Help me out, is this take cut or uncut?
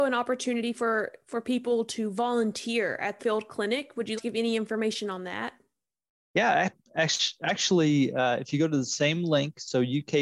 cut